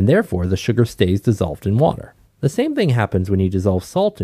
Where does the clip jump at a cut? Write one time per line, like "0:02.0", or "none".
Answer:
0:02.2